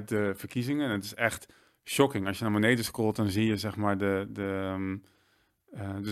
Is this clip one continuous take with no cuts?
yes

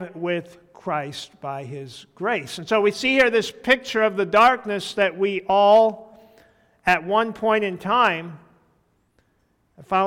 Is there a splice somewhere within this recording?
no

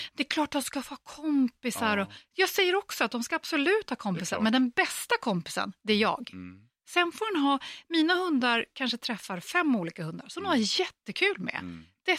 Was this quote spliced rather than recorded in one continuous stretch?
no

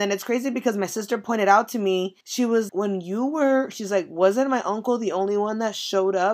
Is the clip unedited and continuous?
no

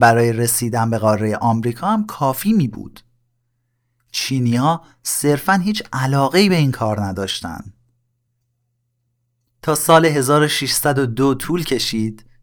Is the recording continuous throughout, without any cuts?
yes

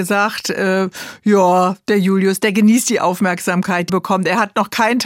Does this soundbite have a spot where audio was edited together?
yes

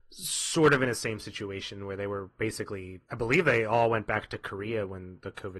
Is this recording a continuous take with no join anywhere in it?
no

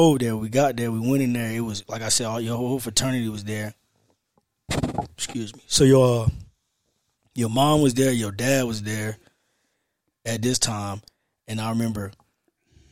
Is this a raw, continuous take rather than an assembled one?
yes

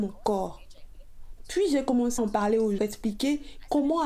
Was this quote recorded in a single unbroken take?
no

